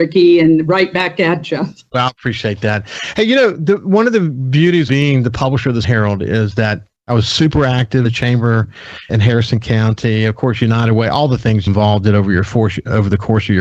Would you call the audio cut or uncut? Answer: cut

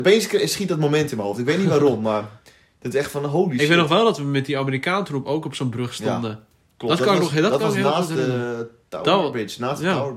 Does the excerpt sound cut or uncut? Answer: uncut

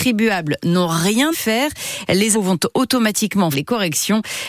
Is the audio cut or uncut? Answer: cut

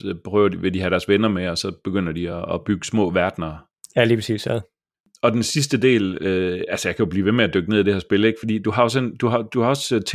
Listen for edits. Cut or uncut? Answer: uncut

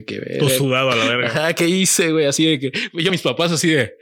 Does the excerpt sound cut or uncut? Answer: cut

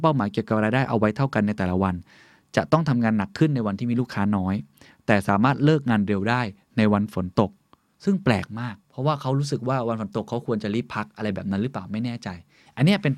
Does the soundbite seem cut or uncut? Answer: cut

